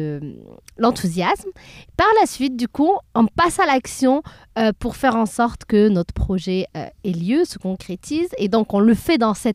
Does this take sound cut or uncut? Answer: uncut